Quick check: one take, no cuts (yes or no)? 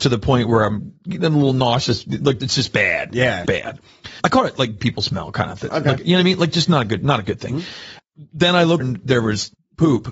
no